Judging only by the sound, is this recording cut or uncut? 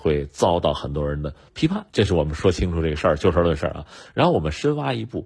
cut